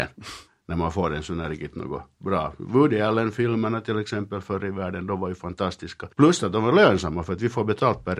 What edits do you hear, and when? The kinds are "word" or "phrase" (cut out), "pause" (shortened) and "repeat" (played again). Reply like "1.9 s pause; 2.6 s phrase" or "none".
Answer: 6.1 s pause